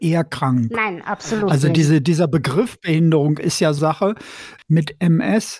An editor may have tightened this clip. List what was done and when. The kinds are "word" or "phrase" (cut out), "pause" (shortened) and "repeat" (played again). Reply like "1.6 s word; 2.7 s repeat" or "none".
3.8 s word